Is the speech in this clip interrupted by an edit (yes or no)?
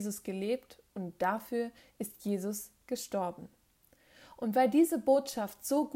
no